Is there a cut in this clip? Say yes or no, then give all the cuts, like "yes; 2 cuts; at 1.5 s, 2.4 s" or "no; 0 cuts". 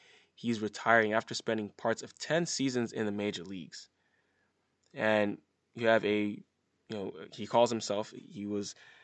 no; 0 cuts